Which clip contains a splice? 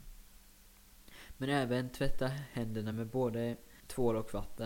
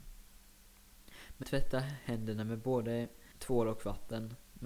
second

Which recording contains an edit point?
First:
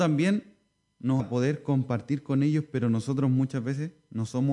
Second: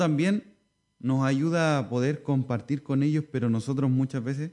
first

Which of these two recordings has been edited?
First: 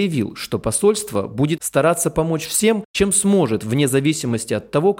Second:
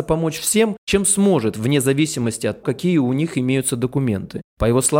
second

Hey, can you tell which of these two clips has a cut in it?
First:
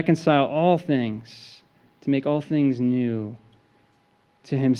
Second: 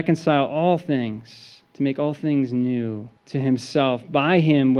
second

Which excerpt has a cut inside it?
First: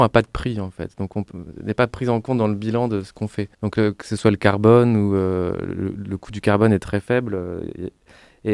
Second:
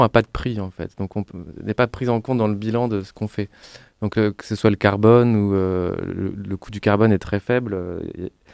first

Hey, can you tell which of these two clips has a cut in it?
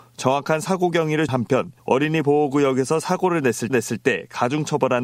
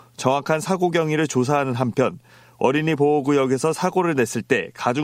first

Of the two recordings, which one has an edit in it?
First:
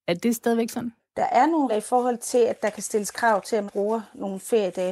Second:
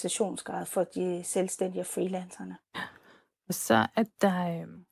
first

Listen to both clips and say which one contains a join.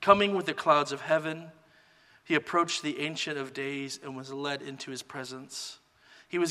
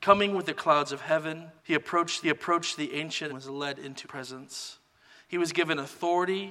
second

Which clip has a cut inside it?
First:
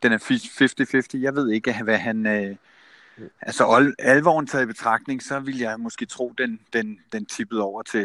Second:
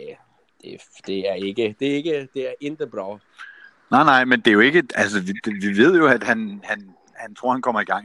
first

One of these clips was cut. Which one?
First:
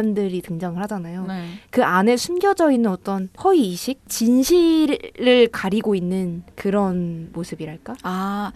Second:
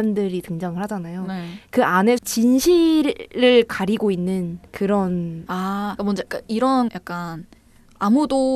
second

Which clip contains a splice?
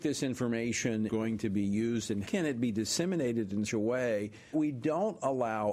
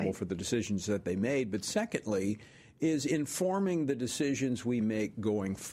first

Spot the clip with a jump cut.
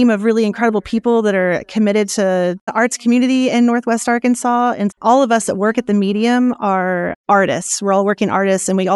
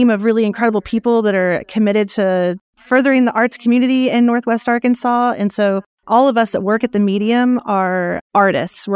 first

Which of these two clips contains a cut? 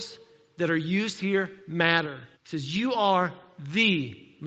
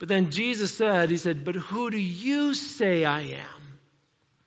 first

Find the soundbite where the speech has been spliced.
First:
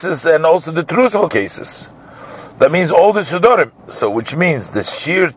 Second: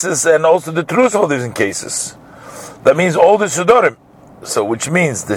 first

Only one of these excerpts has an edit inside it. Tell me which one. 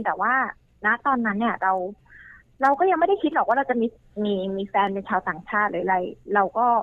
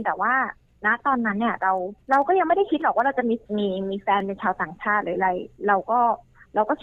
second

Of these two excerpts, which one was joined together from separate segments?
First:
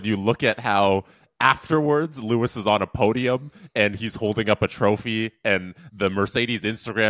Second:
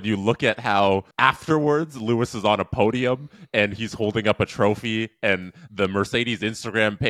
second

